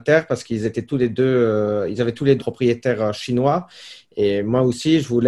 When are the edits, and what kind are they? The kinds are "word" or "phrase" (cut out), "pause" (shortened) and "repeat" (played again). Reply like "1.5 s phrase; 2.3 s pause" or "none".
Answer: 2.4 s word